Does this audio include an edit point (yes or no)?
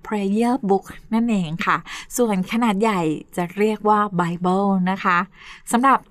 no